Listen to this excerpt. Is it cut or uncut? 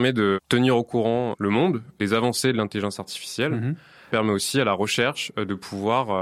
cut